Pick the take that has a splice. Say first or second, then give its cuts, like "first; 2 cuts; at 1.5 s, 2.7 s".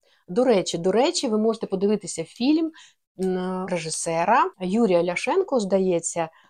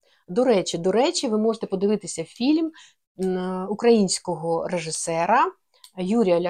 first; 2 cuts; at 3.7 s, 4.5 s